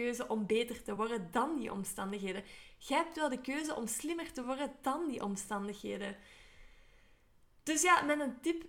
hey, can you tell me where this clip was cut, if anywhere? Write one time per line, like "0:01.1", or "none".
none